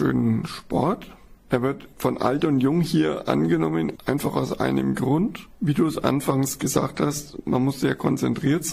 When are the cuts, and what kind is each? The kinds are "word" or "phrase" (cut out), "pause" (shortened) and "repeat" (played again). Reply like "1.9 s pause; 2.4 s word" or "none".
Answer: 1.9 s pause